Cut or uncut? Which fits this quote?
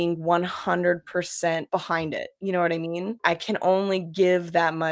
uncut